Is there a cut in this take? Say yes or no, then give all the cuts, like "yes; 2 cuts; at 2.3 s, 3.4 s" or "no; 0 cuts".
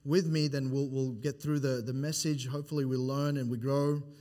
no; 0 cuts